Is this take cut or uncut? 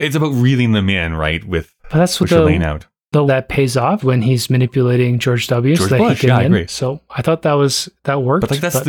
cut